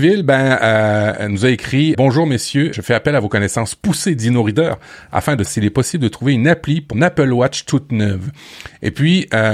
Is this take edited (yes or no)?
yes